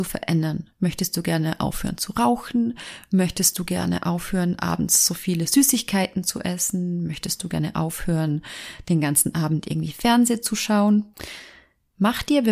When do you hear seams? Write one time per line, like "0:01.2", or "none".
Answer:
none